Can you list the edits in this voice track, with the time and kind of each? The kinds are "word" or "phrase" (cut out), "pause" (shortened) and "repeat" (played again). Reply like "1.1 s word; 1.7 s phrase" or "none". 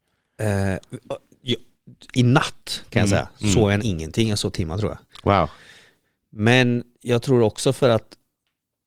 3.8 s word; 4.5 s word; 6.9 s pause

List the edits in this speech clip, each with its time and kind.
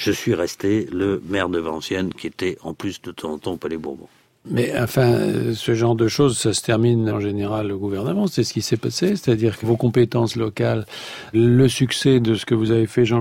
7.1 s word; 9.6 s word; 11.3 s word

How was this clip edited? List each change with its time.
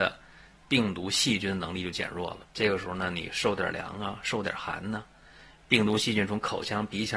2.4 s pause

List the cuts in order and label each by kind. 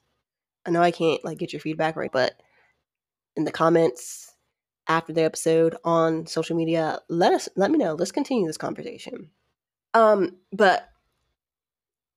2.1 s word; 9.7 s pause

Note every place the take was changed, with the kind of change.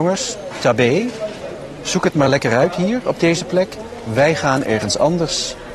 none

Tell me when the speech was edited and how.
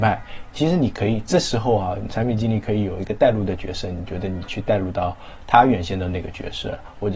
2.1 s word

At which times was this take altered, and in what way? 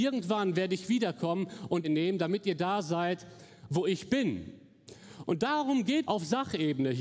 1.8 s phrase; 6.0 s word

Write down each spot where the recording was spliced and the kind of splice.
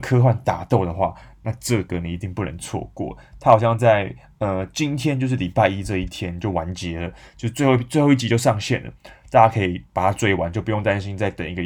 9.9 s pause

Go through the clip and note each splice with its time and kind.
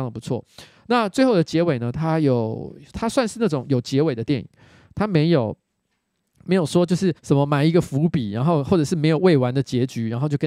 7.2 s pause

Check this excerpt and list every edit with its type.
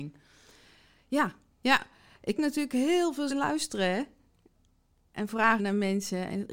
2.4 s word; 3.3 s word; 5.6 s word

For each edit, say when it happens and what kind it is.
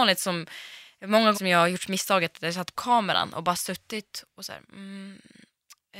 1.3 s word; 2.7 s word

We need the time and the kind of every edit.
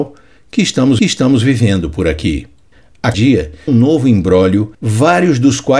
1.0 s repeat; 3.1 s word; 3.7 s phrase; 4.7 s pause

